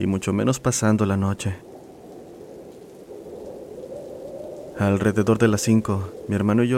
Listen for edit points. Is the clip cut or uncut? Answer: uncut